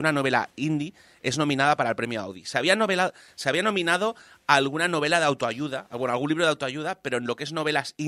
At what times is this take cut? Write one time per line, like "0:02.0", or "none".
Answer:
none

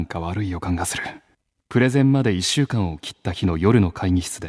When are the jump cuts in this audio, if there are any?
0:01.3

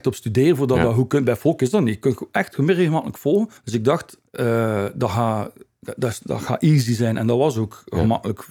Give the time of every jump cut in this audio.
0:03.6
0:04.3

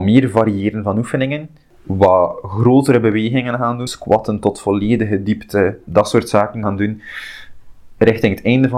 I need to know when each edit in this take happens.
0:03.9
0:05.9
0:06.6

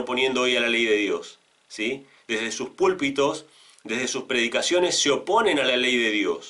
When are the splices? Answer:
none

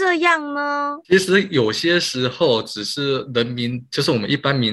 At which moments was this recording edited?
0:01.0

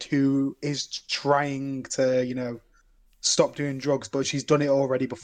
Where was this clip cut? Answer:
none

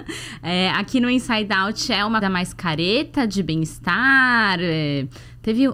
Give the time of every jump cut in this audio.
0:02.2

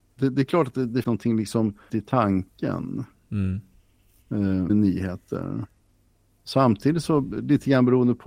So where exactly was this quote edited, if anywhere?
0:01.0
0:01.9
0:04.7

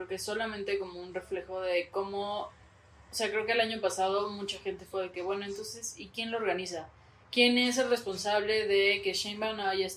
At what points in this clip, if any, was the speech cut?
none

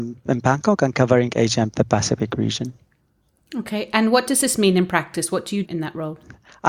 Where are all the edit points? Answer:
0:05.6

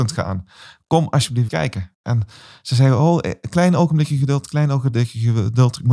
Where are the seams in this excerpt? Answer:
0:01.5

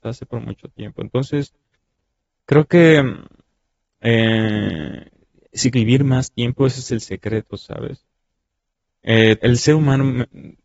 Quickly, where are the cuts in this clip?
0:05.7
0:09.4

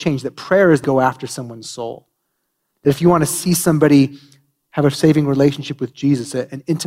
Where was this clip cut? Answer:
none

